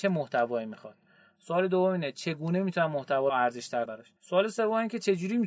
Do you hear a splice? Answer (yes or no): yes